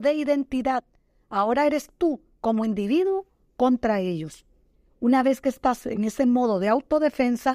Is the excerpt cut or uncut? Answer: uncut